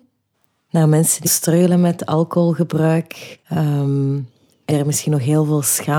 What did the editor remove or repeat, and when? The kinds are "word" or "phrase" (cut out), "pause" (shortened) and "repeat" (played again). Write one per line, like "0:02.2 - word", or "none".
0:01.3 - phrase
0:03.4 - pause
0:04.7 - word